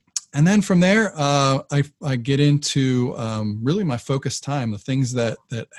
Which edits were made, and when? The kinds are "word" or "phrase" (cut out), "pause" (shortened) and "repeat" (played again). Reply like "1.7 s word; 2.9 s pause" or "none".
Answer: none